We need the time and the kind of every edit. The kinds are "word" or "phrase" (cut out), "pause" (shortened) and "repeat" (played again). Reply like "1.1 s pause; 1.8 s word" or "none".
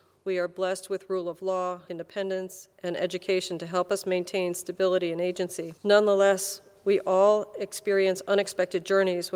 1.9 s word; 2.7 s pause; 5.8 s pause